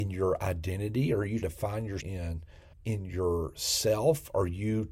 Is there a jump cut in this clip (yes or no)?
yes